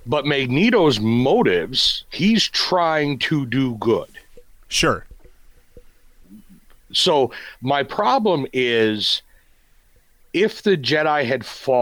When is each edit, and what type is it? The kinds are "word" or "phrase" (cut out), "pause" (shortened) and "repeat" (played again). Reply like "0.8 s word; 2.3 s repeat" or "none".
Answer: none